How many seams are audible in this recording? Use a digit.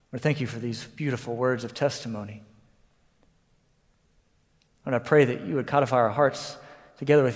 0